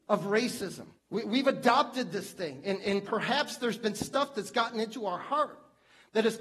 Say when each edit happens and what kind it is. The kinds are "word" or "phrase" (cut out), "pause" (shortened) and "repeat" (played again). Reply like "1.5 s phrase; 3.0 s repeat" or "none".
1.0 s pause